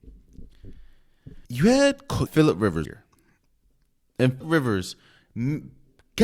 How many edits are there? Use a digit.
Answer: 4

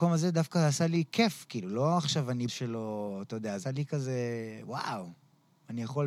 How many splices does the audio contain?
2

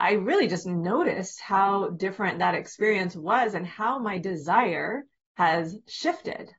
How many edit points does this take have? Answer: 1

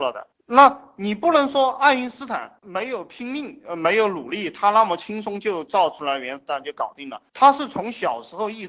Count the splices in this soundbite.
1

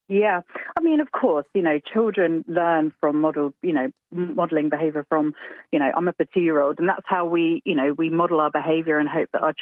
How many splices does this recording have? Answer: 2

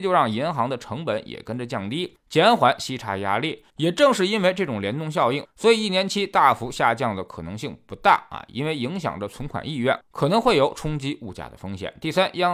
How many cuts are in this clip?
1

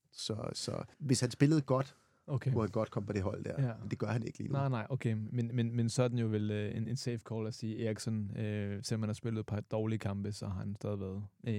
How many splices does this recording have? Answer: 1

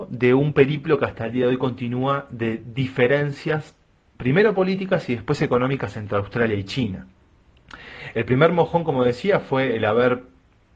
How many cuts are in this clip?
0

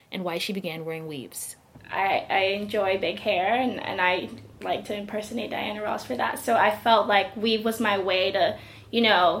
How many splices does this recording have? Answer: 0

